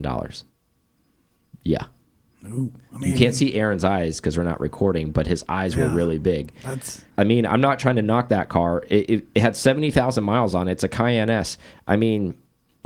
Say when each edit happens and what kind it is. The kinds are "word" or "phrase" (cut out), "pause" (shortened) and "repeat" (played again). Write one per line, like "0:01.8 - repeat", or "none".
0:07.1 - pause